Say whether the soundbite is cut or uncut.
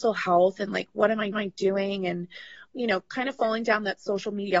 cut